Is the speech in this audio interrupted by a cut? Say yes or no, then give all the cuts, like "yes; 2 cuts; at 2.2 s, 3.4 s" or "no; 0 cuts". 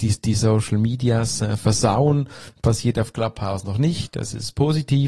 no; 0 cuts